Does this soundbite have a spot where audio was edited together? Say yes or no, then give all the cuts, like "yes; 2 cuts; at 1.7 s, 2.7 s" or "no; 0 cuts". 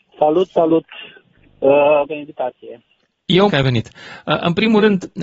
yes; 2 cuts; at 2.1 s, 3.5 s